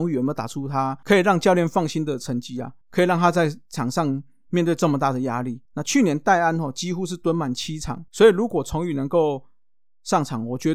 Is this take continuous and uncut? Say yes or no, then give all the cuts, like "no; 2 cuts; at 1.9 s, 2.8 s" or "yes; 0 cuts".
no; 3 cuts; at 2.8 s, 5.6 s, 8.1 s